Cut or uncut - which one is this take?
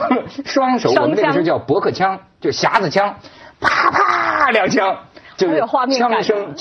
uncut